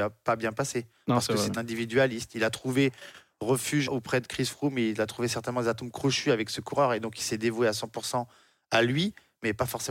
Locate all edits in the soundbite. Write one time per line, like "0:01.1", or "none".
0:01.5
0:03.9